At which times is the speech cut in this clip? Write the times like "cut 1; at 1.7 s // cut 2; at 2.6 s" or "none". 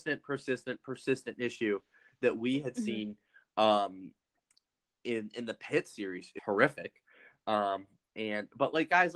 cut 1; at 6.4 s